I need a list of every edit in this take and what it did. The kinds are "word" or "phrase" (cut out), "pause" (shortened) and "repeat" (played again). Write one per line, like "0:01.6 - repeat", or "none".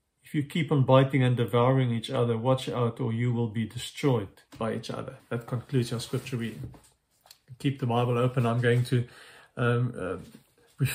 0:04.5 - pause
0:05.2 - pause